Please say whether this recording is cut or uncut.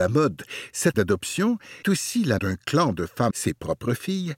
cut